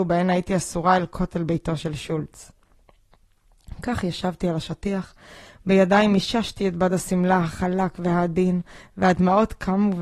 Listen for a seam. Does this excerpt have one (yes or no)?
no